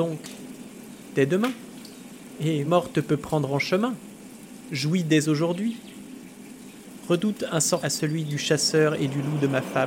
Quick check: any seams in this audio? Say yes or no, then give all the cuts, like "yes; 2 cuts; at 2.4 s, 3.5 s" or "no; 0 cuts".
yes; 2 cuts; at 2.7 s, 7.8 s